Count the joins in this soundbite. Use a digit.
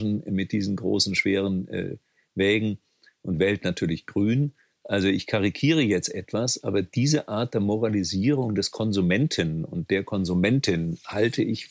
0